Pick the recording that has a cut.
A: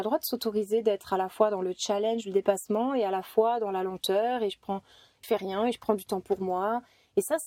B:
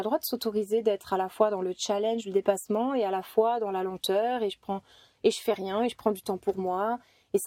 A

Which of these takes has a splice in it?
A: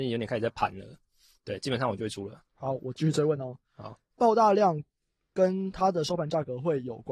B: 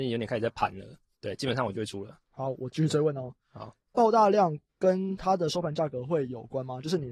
B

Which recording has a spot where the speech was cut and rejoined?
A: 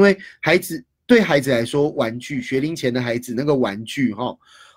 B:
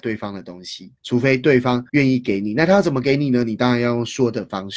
B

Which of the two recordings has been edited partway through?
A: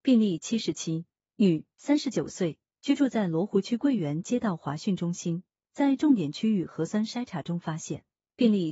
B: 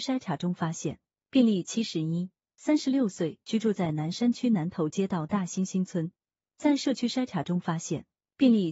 B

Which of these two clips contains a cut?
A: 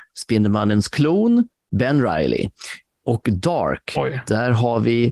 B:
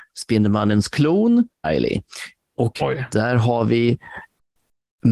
B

